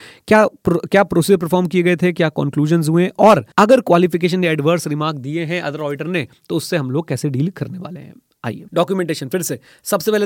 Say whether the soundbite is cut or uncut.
cut